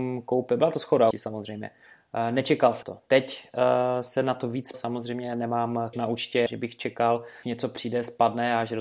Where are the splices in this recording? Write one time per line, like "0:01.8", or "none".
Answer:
0:01.1
0:02.8
0:04.7
0:05.9
0:06.5
0:07.4